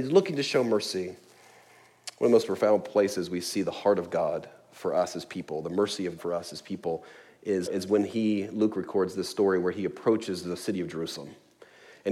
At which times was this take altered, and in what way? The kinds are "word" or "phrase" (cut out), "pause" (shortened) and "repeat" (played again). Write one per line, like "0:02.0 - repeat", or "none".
0:06.2 - word
0:07.7 - word